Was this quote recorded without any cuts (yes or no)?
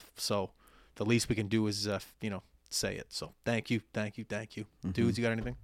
yes